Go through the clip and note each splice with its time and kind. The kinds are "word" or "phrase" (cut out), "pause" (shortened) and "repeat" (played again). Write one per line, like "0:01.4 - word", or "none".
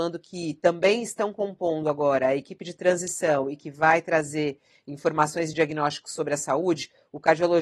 none